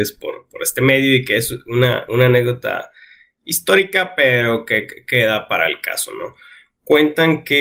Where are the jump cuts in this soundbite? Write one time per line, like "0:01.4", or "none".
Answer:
none

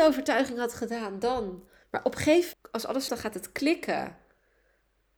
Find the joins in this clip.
0:01.8
0:02.5
0:03.1

